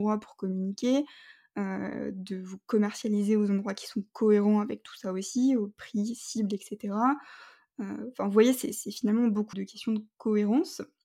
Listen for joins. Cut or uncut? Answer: cut